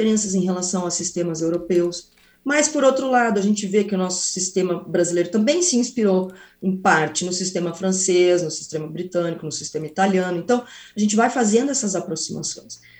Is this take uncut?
yes; 0 cuts

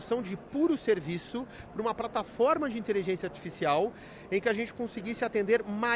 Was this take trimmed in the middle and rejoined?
no; 0 cuts

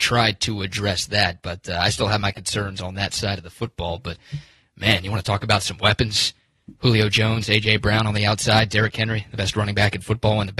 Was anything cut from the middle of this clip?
no; 0 cuts

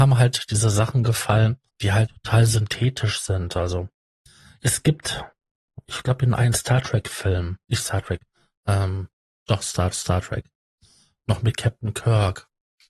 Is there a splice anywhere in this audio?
yes; 3 cuts; at 1.7 s, 2.1 s, 9.9 s

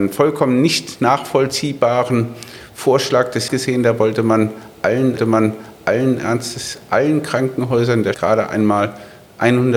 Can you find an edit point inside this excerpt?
yes; 3 cuts; at 3.5 s, 5.2 s, 8.1 s

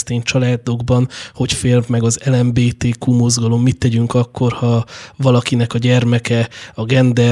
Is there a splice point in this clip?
no; 0 cuts

